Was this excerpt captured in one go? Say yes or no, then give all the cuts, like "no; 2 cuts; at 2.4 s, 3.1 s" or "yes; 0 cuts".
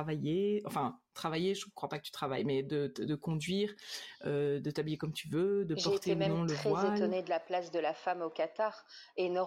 yes; 0 cuts